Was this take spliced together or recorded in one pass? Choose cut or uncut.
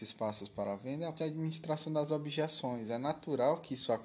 cut